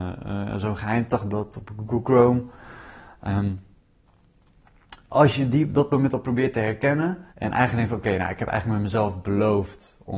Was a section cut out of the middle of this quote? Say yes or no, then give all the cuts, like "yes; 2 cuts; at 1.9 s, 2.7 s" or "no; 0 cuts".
yes; 1 cut; at 7.3 s